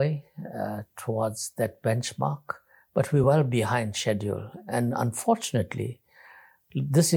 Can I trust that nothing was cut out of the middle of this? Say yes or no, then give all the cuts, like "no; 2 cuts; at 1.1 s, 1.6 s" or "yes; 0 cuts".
yes; 0 cuts